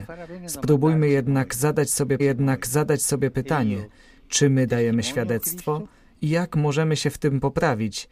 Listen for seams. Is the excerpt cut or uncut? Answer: cut